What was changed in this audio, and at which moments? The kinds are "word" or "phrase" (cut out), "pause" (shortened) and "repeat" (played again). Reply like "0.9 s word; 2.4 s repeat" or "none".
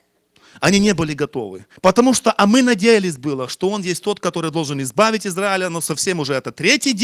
1.8 s pause